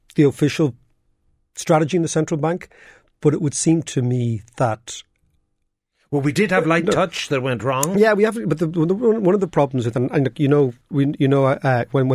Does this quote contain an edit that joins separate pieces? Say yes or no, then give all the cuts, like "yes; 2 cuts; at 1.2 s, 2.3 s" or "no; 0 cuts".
yes; 1 cut; at 10.8 s